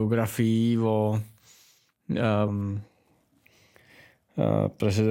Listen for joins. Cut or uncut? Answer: cut